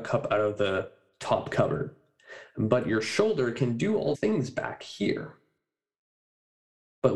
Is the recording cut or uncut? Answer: cut